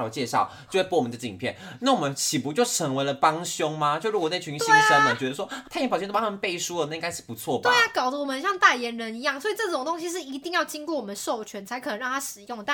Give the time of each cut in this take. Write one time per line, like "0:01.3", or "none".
0:05.7